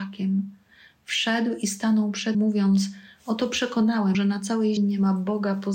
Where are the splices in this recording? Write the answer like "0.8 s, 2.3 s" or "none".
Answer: 2.3 s, 4.1 s, 4.8 s